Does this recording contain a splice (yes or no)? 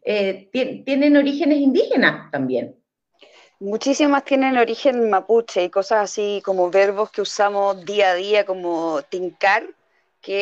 no